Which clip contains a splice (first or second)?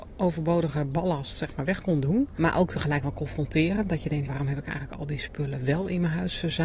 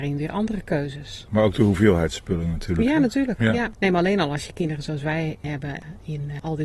first